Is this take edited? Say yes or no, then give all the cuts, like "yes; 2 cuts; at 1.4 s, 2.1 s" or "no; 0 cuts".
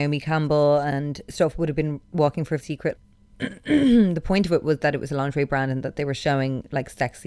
yes; 2 cuts; at 2.6 s, 3.0 s